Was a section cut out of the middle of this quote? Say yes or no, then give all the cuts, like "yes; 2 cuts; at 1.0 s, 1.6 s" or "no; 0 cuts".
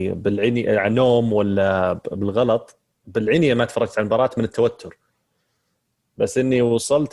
no; 0 cuts